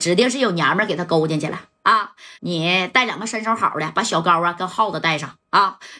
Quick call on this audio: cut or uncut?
cut